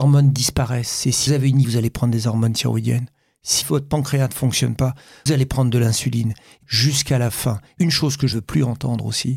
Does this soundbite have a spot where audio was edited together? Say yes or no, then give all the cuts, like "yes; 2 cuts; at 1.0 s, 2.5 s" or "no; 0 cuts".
yes; 7 cuts; at 1.3 s, 1.6 s, 3.6 s, 5.3 s, 6.6 s, 7.8 s, 8.3 s